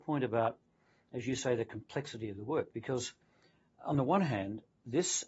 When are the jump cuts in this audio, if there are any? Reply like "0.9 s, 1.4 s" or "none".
none